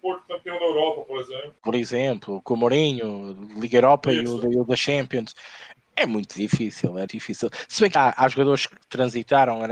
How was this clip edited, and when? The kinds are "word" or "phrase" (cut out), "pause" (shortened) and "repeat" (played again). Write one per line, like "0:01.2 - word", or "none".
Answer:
0:01.6 - pause
0:07.1 - word
0:07.9 - word
0:08.8 - pause